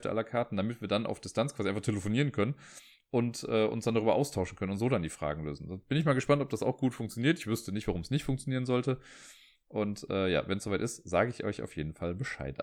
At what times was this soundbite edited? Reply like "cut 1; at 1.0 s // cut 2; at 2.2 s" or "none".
none